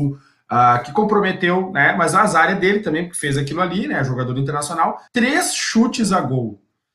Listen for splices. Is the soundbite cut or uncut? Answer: cut